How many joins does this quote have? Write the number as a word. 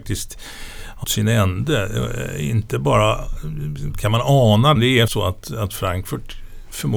three